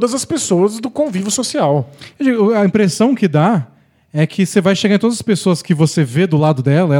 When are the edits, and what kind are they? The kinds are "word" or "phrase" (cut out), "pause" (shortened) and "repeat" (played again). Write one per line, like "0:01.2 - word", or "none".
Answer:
none

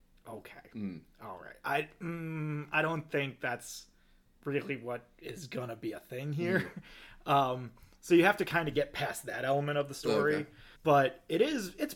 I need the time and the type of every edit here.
0:10.7 - pause

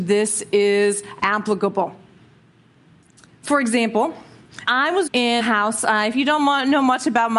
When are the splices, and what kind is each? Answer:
0:04.6 - word
0:05.1 - word
0:05.4 - word

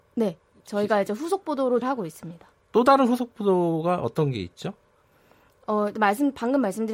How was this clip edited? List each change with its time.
0:01.8 - word

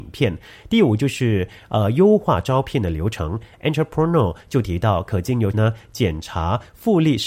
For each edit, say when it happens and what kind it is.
0:05.5 - word

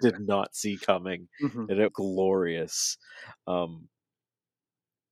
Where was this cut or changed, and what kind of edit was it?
0:01.9 - word

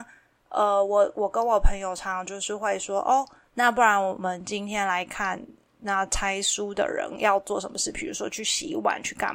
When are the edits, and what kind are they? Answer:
none

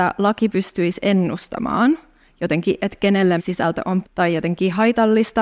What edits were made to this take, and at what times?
0:02.8 - word
0:03.4 - word
0:04.0 - word

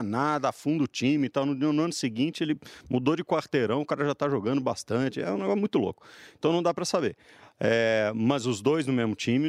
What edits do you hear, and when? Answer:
none

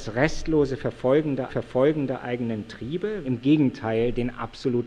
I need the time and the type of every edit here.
0:01.5 - repeat
0:03.2 - phrase

